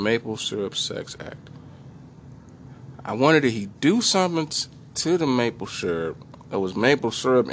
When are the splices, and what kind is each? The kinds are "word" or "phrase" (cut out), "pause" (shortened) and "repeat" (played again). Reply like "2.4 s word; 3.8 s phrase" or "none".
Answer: none